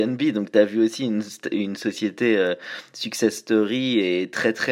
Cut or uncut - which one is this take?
uncut